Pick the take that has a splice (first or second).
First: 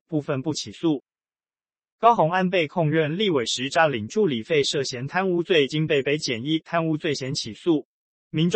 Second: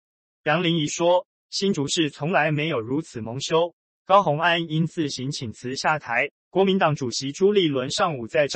second